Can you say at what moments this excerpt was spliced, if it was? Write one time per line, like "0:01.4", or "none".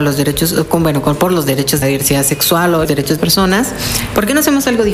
0:01.8
0:02.8
0:03.2